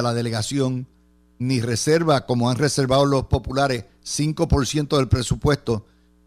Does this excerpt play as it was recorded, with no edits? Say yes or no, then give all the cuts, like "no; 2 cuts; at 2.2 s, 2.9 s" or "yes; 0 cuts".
yes; 0 cuts